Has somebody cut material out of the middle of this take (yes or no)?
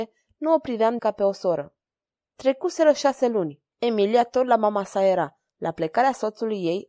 yes